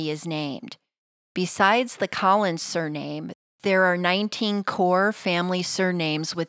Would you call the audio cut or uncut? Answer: uncut